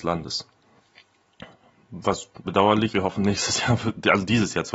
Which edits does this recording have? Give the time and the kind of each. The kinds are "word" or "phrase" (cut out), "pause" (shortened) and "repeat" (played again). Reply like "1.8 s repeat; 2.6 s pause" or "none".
2.5 s word; 2.9 s word